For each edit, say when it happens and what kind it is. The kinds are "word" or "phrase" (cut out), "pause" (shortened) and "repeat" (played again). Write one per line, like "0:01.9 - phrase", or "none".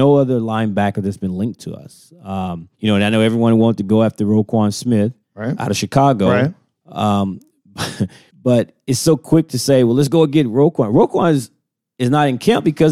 0:02.7 - pause
0:05.2 - pause
0:08.3 - pause

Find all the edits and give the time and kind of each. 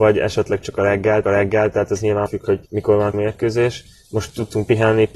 0:01.2 - repeat
0:02.3 - word
0:02.7 - pause
0:03.1 - word

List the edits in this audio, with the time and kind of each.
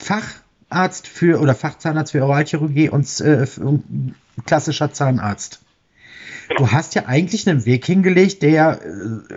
none

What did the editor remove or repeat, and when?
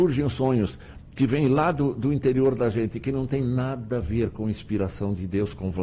none

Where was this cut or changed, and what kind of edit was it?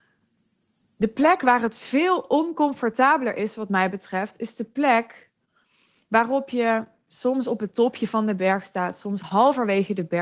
none

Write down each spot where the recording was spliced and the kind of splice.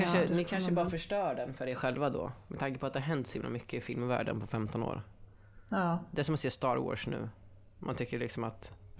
none

